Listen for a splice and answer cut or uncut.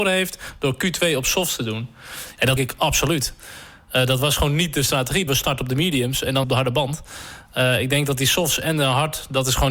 cut